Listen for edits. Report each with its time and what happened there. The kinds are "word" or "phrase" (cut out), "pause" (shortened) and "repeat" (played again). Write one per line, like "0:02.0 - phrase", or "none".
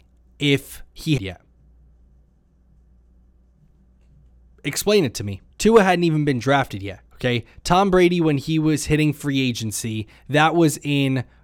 0:01.2 - phrase
0:05.5 - pause
0:07.1 - pause

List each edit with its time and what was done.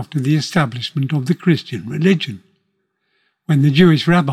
none

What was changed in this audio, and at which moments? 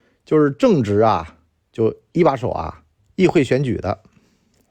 0:01.6 - pause
0:02.9 - pause

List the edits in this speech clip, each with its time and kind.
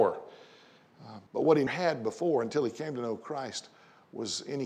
0:01.3 - pause
0:01.7 - word

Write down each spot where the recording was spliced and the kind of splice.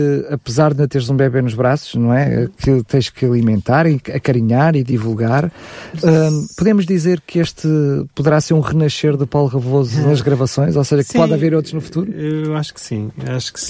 none

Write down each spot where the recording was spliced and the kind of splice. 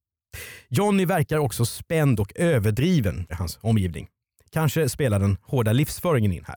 0:03.3 - word

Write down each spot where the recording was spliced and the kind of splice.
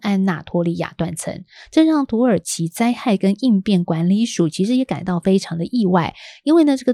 none

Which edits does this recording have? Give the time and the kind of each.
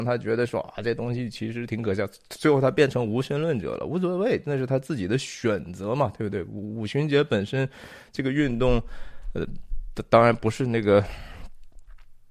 none

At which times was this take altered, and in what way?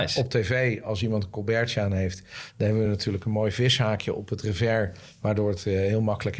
none

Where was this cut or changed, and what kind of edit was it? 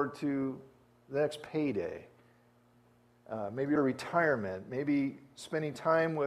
0:03.8 - phrase

